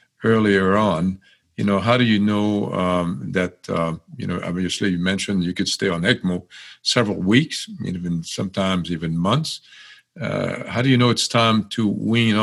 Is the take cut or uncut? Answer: uncut